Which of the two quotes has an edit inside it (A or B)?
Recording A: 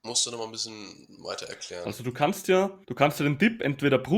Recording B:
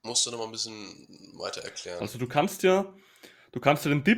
A